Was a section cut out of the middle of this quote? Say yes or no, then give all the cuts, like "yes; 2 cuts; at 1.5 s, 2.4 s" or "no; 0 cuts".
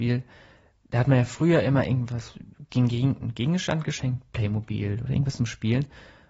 no; 0 cuts